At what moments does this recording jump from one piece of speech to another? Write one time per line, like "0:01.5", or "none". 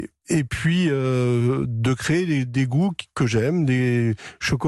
none

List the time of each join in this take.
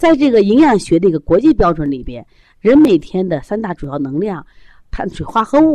none

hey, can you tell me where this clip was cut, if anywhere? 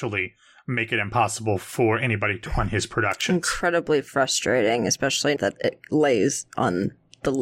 0:02.5
0:05.4

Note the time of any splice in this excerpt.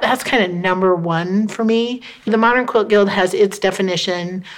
0:02.3

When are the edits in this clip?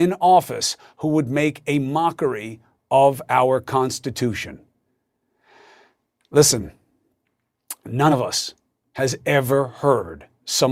none

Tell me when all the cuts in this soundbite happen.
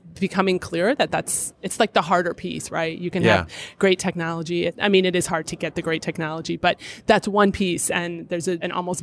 none

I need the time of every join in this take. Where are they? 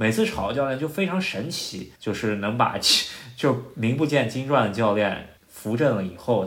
0:02.0
0:05.4

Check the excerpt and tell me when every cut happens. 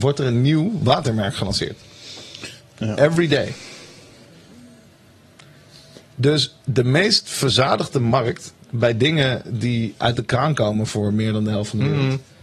none

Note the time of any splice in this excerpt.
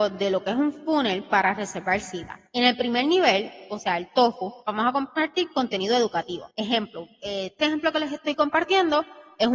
0:02.5
0:04.6
0:06.5

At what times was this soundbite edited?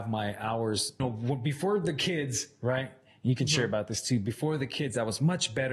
0:01.0

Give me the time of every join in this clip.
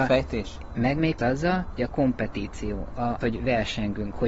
0:01.2
0:01.8
0:03.2

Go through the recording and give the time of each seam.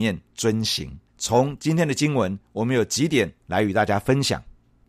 0:01.1

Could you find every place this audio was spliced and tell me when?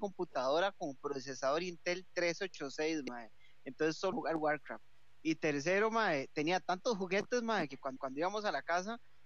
0:04.1
0:08.0

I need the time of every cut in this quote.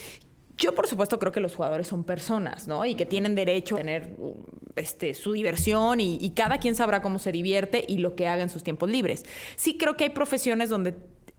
0:03.7

